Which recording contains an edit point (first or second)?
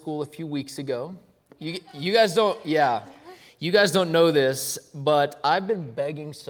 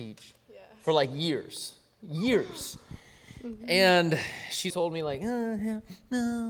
second